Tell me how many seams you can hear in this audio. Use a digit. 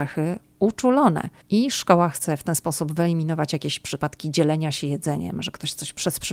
1